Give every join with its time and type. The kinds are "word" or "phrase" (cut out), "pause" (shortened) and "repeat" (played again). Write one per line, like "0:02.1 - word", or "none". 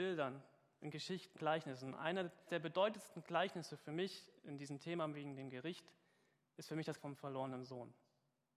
0:01.3 - word
0:02.5 - word
0:07.0 - word